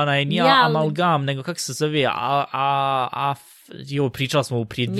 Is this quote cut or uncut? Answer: uncut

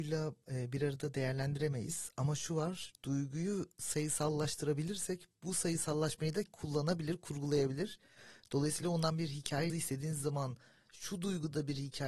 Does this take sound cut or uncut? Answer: cut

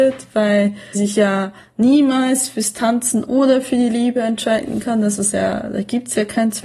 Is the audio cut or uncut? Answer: cut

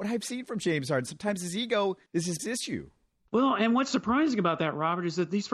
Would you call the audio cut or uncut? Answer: cut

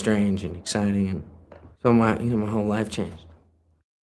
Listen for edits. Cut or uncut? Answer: cut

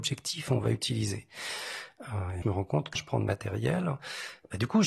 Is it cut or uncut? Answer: cut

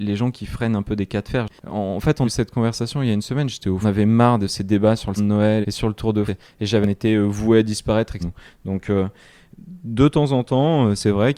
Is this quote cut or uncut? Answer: cut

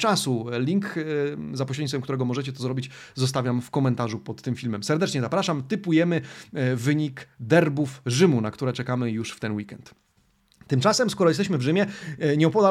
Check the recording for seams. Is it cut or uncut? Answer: uncut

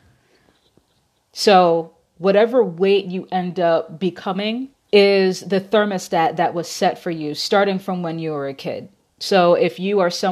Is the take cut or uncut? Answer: cut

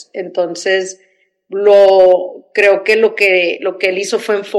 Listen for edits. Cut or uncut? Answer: uncut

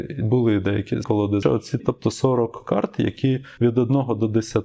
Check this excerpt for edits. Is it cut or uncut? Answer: cut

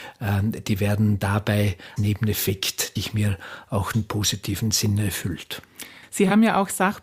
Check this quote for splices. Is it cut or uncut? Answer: cut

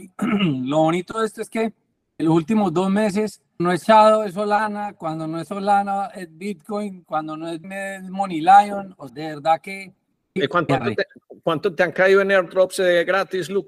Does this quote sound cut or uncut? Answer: cut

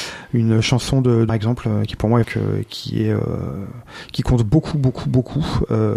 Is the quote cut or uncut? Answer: cut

